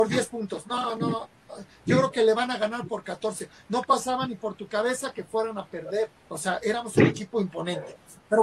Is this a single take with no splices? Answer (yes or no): no